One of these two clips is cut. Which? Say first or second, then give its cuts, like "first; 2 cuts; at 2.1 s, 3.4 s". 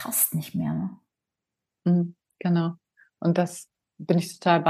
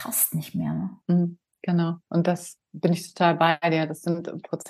second; 3 cuts; at 1.0 s, 2.0 s, 2.6 s